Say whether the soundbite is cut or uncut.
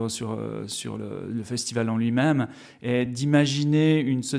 uncut